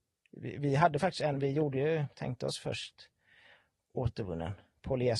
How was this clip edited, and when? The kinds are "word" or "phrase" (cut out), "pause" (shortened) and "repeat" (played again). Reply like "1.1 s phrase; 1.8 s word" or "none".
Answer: none